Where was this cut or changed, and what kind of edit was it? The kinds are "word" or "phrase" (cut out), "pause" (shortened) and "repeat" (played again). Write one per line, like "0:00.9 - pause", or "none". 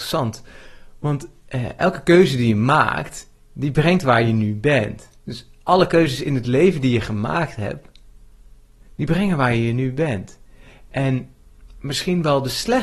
0:05.2 - pause